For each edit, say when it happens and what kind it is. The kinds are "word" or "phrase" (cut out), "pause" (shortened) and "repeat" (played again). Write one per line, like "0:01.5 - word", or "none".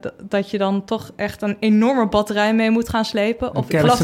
none

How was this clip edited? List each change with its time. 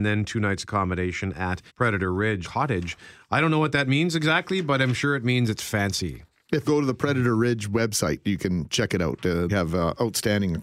0:01.7 - pause
0:02.4 - phrase
0:06.6 - word
0:09.5 - word

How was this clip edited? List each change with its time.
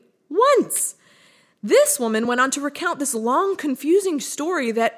none

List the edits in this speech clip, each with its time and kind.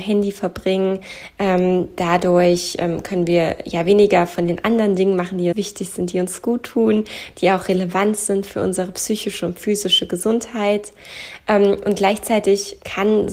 0:05.5 - word

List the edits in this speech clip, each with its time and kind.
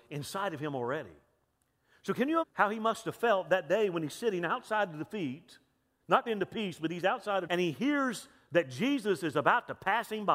0:02.4 - word
0:06.3 - word
0:07.5 - word

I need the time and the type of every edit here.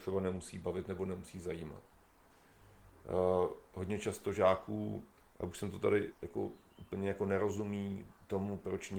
0:06.1 - word

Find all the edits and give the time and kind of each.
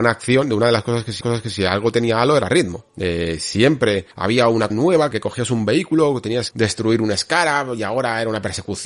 0:01.2 - repeat
0:02.9 - pause
0:04.1 - pause
0:04.7 - word
0:05.1 - phrase
0:06.5 - word

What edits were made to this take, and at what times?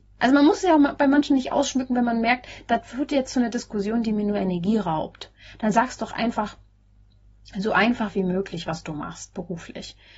none

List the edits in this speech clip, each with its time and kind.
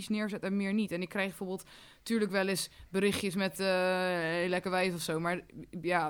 none

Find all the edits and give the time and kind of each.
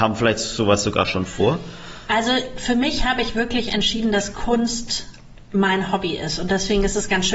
none

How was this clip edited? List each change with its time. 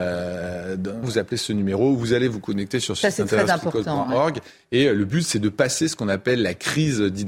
0:01.0 - word

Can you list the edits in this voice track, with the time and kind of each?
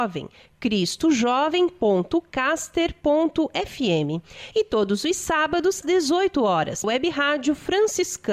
0:05.8 - word
0:06.8 - word

